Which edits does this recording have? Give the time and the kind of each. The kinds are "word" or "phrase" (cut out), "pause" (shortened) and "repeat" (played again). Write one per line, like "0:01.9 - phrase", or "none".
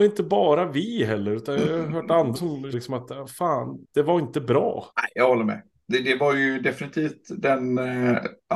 0:02.4 - word
0:02.7 - word
0:03.8 - pause
0:04.9 - pause